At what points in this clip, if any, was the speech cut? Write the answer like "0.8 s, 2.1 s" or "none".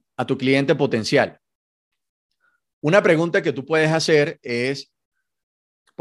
none